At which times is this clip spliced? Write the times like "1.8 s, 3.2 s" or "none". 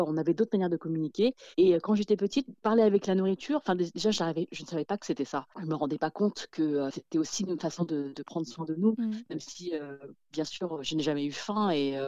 1.5 s, 5.5 s